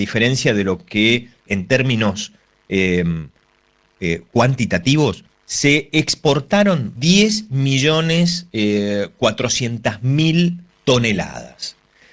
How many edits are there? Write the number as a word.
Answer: three